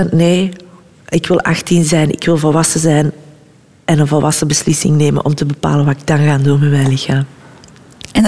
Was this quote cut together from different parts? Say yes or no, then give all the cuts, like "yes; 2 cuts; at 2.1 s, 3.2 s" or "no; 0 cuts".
no; 0 cuts